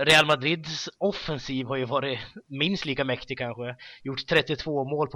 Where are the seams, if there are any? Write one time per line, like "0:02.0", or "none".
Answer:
none